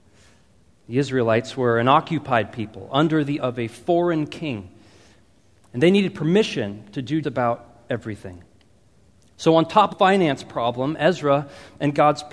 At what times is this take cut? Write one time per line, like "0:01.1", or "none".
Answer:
0:03.4
0:07.2
0:09.9